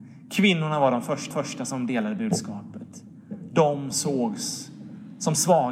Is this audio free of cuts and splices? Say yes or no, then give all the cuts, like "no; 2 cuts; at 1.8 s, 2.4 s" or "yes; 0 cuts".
no; 2 cuts; at 1.3 s, 3.9 s